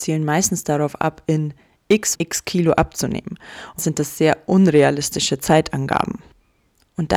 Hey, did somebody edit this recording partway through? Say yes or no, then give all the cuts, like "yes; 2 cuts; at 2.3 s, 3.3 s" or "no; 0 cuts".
yes; 2 cuts; at 2.1 s, 3.8 s